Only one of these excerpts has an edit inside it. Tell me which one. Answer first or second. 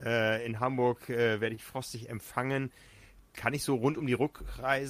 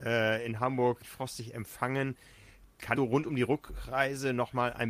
second